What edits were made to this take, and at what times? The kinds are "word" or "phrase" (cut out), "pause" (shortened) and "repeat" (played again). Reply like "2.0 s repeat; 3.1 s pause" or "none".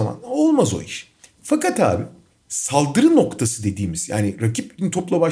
none